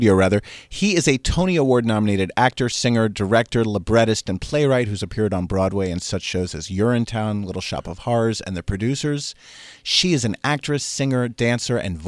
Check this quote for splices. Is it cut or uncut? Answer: uncut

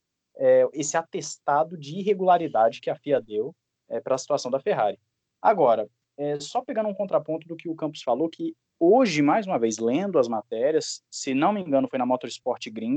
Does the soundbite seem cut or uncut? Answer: uncut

